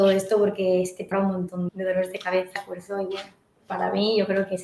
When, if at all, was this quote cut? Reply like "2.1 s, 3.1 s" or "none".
1.1 s, 1.7 s, 2.6 s, 3.6 s